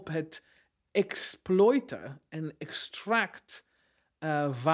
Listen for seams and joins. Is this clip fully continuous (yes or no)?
yes